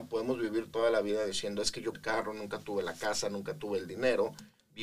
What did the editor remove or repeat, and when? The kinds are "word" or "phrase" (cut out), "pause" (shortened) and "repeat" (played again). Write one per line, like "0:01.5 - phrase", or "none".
0:01.9 - phrase

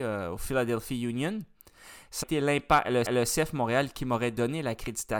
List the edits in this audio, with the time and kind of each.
0:02.2 - word
0:03.0 - repeat

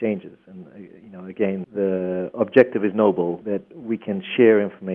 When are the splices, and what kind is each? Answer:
0:01.6 - word
0:03.4 - word

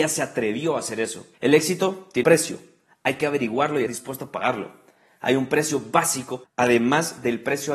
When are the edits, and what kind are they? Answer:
0:01.3 - pause
0:02.2 - word
0:03.9 - word
0:06.4 - phrase

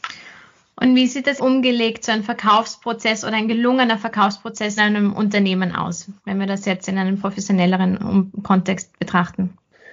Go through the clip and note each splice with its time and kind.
0:01.4 - word
0:04.8 - word
0:06.2 - pause

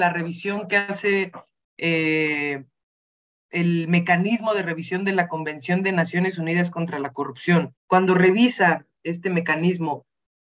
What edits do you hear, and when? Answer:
0:07.8 - pause

